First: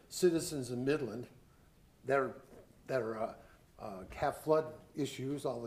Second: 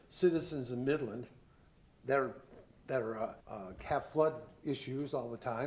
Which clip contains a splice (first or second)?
second